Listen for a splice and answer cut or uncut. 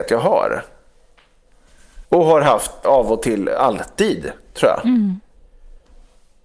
cut